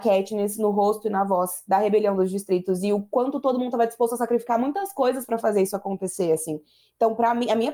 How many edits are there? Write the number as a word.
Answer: zero